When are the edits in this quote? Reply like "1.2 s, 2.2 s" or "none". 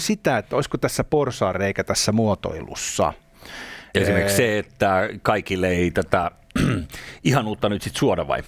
none